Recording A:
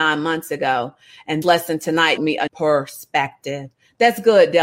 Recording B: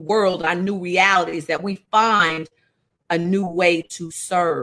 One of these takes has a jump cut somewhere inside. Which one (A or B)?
A